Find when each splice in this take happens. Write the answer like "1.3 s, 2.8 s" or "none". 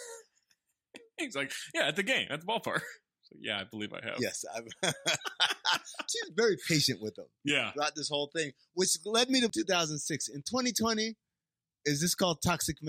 9.5 s